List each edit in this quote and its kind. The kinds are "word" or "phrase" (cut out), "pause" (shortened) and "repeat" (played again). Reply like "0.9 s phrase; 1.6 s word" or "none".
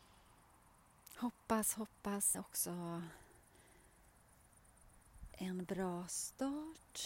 2.3 s phrase; 5.3 s word